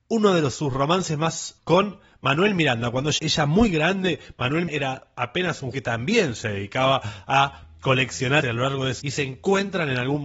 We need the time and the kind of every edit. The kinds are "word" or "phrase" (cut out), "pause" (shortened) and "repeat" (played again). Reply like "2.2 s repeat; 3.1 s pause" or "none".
1.6 s word; 3.2 s word; 4.7 s word; 5.7 s word; 8.4 s word; 9.0 s word

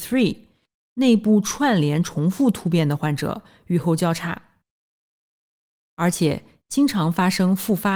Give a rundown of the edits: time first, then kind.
none

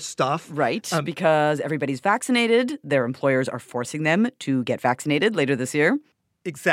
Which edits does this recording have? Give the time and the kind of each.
none

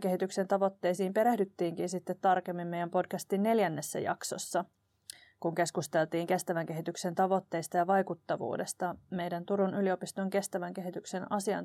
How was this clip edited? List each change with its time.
none

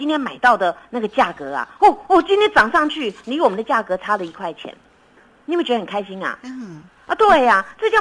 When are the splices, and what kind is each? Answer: none

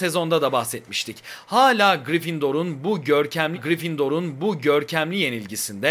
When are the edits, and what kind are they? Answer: 3.5 s repeat

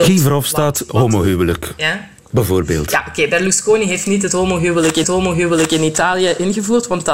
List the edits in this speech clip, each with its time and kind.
2.2 s pause; 5.0 s repeat

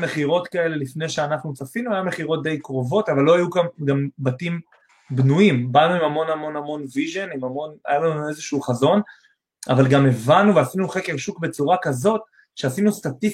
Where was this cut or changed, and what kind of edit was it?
none

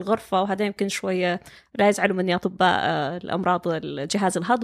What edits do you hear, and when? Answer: none

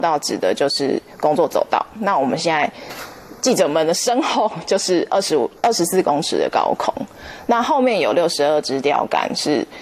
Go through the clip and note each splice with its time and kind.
5.6 s pause

